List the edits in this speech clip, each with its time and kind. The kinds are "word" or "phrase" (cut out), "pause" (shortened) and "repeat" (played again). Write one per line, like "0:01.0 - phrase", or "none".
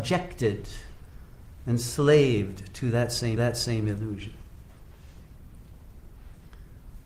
0:03.4 - repeat

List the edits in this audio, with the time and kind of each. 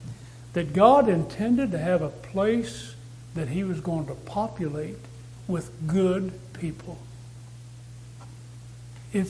none

